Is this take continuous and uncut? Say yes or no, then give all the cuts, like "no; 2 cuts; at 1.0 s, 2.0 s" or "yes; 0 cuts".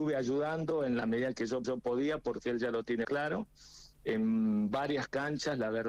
no; 3 cuts; at 1.6 s, 3.0 s, 3.9 s